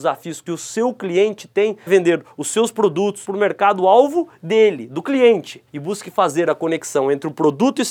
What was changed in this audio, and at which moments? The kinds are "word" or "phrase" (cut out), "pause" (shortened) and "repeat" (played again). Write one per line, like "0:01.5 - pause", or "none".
0:01.9 - word
0:03.2 - phrase
0:05.7 - pause